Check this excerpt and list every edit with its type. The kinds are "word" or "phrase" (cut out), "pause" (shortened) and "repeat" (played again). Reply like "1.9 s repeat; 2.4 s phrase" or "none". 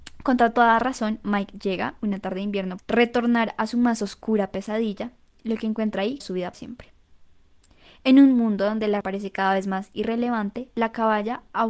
2.8 s word; 6.2 s word; 6.5 s word; 9.0 s word